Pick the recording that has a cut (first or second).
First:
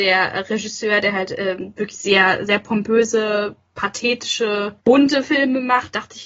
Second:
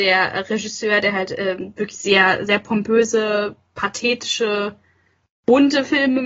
first